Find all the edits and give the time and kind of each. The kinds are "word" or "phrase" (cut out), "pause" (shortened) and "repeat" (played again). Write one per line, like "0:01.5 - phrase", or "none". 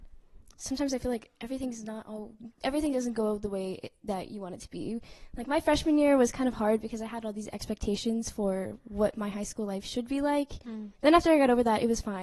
0:10.9 - pause